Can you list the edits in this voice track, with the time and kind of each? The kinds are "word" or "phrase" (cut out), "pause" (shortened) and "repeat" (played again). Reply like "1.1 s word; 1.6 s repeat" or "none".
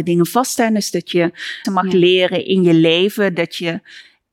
1.6 s word